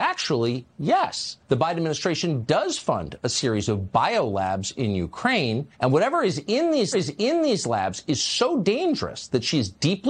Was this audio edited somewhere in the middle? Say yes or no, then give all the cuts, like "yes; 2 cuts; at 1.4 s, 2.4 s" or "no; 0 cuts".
yes; 3 cuts; at 1.4 s, 5.7 s, 6.9 s